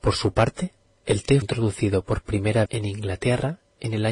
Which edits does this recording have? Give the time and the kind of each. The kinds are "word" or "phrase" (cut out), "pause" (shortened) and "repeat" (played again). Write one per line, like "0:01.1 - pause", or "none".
0:01.4 - word
0:02.7 - word